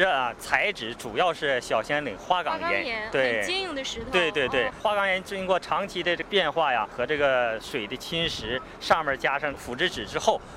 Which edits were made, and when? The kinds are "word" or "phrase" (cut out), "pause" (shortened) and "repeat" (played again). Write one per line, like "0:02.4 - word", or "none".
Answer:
0:04.7 - word

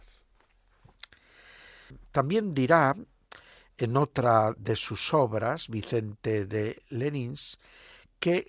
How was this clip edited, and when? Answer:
none

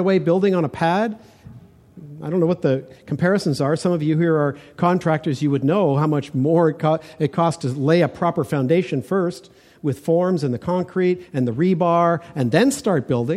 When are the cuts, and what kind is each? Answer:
none

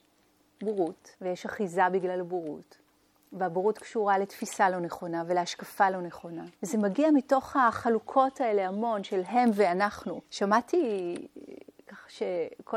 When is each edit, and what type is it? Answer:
0:01.1 - pause
0:02.9 - pause
0:06.6 - pause
0:10.2 - pause

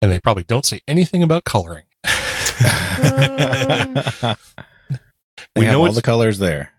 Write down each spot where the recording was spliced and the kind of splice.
0:01.9 - pause

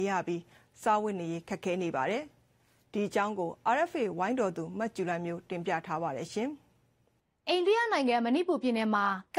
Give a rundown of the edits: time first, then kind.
none

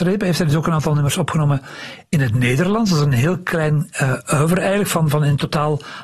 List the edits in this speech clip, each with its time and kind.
none

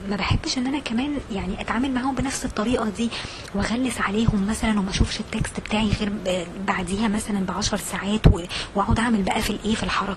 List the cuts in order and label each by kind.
none

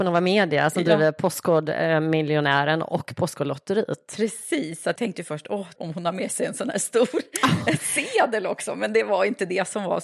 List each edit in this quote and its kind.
0:05.0 - word
0:05.8 - word

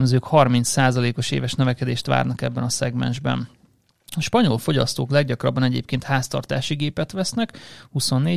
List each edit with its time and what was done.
none

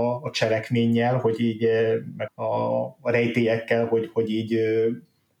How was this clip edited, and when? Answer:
0:02.3 - word

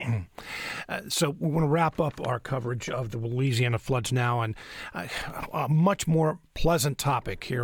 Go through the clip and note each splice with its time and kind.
none

